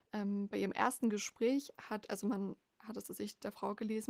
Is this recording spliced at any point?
yes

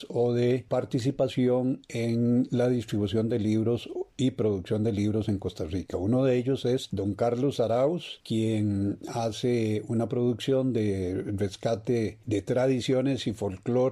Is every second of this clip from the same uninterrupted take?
yes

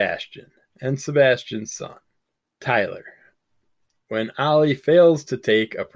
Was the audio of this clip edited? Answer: yes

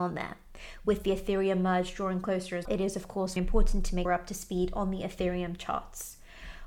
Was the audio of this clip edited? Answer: yes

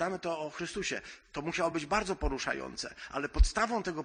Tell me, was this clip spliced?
no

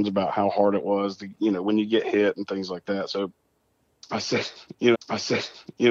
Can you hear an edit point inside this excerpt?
yes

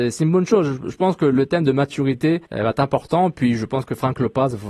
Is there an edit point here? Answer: yes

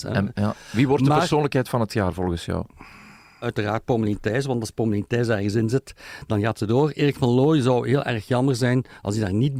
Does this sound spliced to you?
no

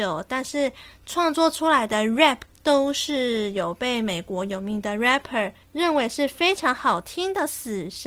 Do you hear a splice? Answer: no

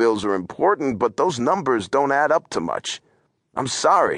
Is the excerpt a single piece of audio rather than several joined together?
yes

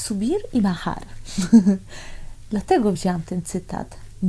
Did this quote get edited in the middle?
no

